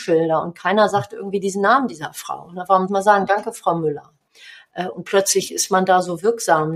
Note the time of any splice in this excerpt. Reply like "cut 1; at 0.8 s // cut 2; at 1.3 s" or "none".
cut 1; at 2.9 s